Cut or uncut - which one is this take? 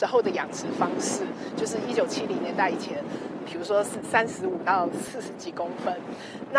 cut